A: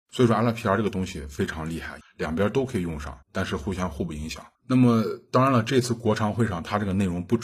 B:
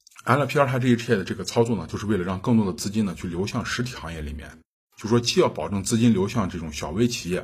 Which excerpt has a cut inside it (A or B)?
A